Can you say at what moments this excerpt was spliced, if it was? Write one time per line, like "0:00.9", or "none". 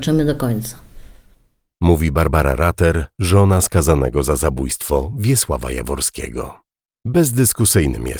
none